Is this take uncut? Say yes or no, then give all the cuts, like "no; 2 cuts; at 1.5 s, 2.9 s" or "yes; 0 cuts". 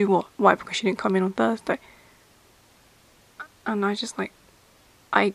yes; 0 cuts